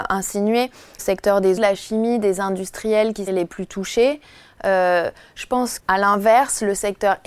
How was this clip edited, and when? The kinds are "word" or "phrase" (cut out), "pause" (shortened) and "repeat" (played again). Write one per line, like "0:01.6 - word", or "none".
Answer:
0:01.0 - word
0:01.6 - word
0:03.3 - word
0:05.8 - word